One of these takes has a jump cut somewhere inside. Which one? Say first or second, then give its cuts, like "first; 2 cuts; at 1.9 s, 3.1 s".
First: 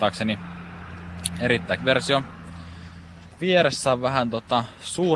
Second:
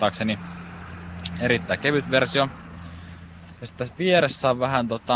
first; 2 cuts; at 1.8 s, 3.3 s